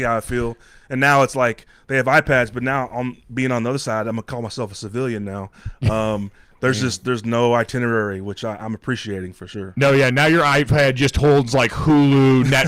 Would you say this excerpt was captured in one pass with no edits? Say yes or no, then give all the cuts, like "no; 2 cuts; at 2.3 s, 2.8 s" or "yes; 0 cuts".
yes; 0 cuts